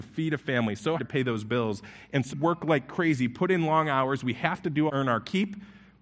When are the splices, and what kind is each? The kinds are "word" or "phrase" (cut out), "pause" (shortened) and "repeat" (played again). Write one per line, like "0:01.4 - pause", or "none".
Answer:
0:01.0 - word
0:02.3 - word
0:04.9 - phrase